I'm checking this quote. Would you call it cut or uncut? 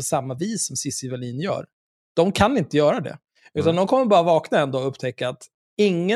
uncut